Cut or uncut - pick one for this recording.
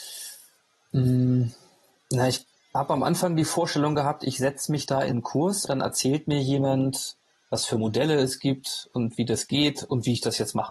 cut